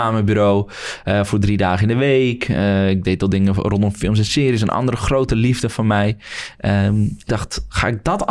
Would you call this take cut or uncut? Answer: cut